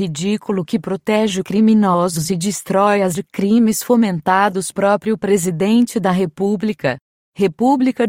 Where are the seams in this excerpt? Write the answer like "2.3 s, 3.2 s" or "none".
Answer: 3.1 s, 4.7 s